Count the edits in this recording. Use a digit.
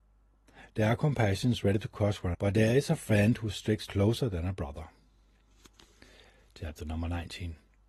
2